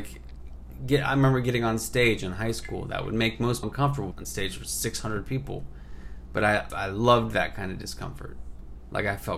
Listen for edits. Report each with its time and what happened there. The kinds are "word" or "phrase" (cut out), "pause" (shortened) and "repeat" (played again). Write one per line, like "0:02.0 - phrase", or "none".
0:03.6 - word
0:04.1 - phrase
0:06.7 - word